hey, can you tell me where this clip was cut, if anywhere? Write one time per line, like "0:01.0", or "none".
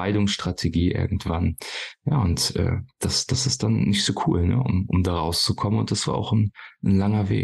none